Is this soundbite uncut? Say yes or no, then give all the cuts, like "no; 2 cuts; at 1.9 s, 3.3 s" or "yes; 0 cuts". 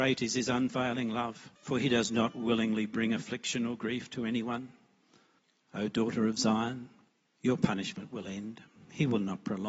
no; 3 cuts; at 1.6 s, 5.4 s, 7.1 s